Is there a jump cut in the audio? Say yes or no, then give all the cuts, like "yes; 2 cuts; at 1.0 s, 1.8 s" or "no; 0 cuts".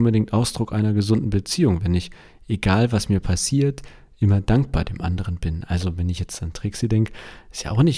no; 0 cuts